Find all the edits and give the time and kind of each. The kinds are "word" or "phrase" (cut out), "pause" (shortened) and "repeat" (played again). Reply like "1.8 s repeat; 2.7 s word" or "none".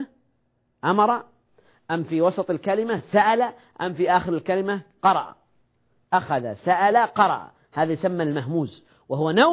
none